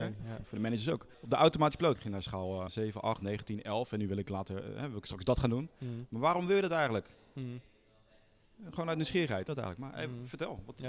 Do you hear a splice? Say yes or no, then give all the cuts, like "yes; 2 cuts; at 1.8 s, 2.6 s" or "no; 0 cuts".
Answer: yes; 4 cuts; at 1.1 s, 2.0 s, 2.7 s, 9.5 s